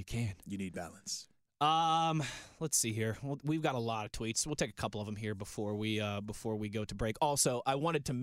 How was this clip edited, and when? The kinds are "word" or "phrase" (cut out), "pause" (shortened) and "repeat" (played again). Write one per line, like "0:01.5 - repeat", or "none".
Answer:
none